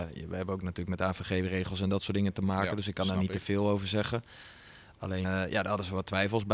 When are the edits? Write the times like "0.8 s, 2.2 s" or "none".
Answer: 5.2 s